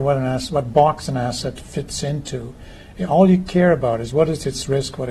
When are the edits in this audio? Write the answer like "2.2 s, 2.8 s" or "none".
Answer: none